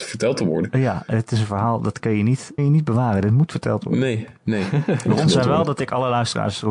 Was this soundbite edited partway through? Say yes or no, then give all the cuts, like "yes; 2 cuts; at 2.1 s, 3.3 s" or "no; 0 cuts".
yes; 2 cuts; at 2.6 s, 4.4 s